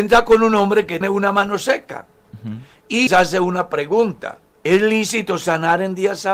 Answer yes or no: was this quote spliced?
yes